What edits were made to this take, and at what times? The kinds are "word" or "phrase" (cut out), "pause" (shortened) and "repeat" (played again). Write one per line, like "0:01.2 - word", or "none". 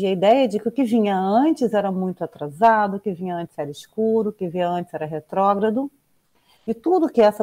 none